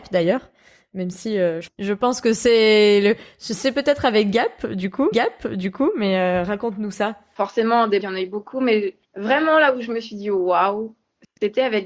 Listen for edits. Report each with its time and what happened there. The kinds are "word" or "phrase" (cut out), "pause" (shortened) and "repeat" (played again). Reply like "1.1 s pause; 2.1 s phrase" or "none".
5.1 s repeat; 8.0 s word; 9.0 s pause